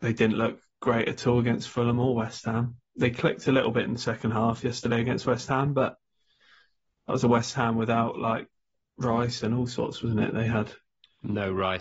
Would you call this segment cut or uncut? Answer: uncut